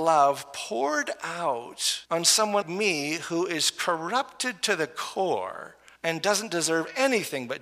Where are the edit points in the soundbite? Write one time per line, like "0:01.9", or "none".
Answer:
0:02.1
0:02.6
0:06.0